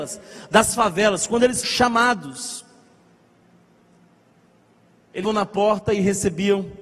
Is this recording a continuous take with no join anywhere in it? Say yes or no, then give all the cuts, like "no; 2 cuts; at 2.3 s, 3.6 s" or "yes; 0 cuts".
no; 2 cuts; at 1.6 s, 5.2 s